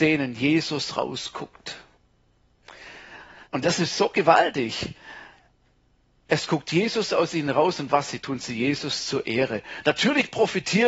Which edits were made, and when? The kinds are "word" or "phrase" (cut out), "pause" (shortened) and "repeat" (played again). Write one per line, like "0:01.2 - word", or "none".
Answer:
0:03.4 - pause
0:08.2 - word